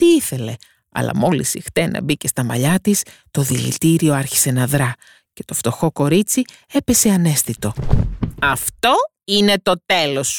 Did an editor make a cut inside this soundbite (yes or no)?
no